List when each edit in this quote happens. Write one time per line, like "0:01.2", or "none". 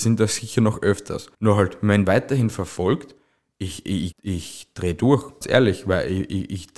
0:01.3
0:02.0
0:04.1
0:05.4